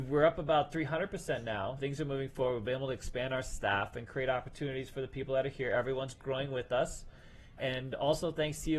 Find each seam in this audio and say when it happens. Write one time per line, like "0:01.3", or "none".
0:01.8
0:07.6

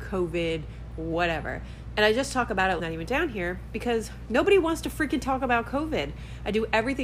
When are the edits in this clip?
0:02.8

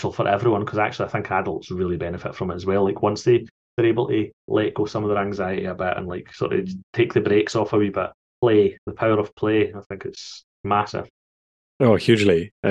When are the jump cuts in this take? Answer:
0:04.4
0:06.8
0:08.1
0:10.5

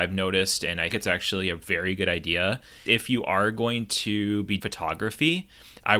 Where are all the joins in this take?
0:00.9
0:02.9
0:04.6

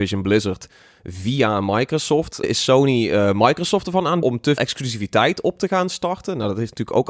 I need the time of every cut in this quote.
0:02.4
0:04.2
0:04.6

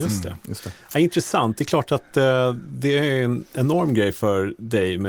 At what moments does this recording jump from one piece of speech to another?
none

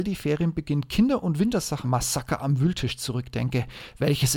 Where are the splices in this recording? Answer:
0:01.8

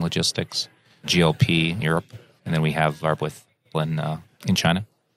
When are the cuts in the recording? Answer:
0:01.8
0:03.2
0:03.7

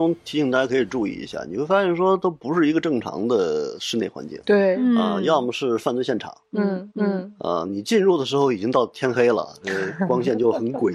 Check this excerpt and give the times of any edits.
0:06.9

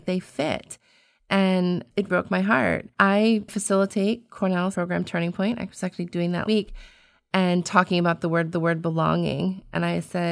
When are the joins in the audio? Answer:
0:02.1
0:02.9
0:04.7
0:06.4
0:08.5

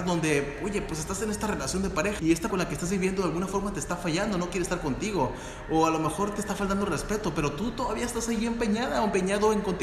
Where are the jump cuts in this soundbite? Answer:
0:02.2
0:02.5

